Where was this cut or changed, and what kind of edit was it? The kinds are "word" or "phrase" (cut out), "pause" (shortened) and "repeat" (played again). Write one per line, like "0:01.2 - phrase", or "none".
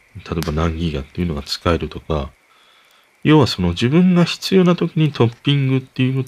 none